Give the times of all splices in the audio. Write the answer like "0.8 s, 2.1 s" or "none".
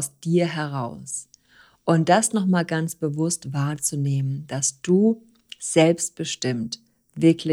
none